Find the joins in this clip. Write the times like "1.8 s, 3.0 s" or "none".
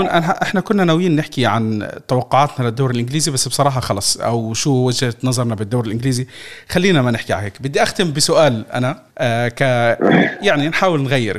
9.1 s